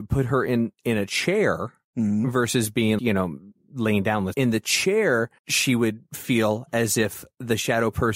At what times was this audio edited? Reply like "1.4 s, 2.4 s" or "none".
3.0 s, 4.3 s, 5.4 s

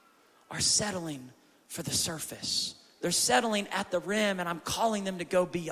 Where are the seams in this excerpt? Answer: none

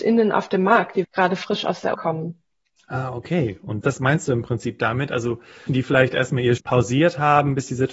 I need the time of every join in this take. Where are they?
1.0 s, 1.9 s, 3.8 s, 5.7 s, 6.6 s

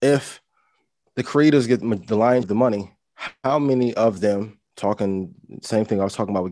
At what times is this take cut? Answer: 2.4 s, 4.7 s

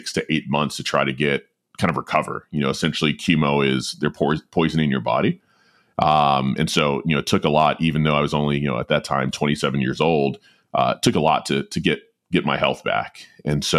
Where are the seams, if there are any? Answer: none

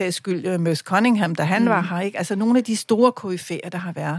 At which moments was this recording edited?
none

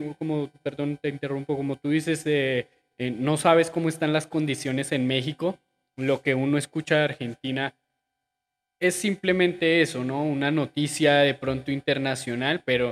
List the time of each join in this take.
none

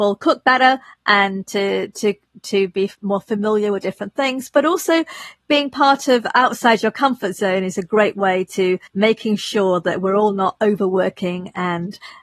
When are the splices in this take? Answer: 8.9 s

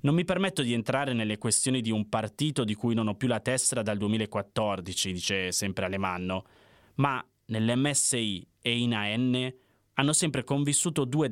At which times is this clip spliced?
none

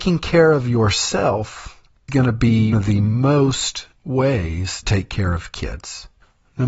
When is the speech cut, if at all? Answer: 2.1 s, 2.7 s, 4.0 s, 4.8 s

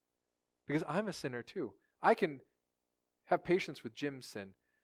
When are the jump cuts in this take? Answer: none

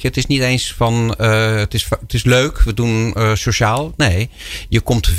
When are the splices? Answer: none

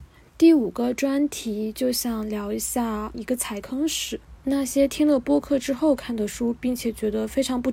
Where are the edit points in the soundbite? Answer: 3.1 s

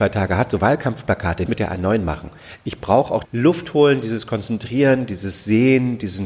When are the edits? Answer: 1.5 s, 3.2 s

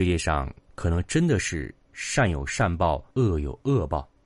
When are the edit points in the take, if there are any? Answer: 3.1 s

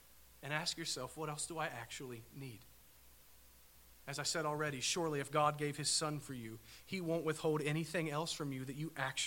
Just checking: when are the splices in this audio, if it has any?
none

